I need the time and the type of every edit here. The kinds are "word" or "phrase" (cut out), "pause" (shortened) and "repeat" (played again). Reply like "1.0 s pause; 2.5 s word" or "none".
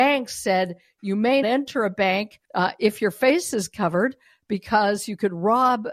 1.4 s word; 2.5 s pause